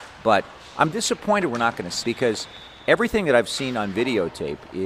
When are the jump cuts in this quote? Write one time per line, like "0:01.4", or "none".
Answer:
0:02.0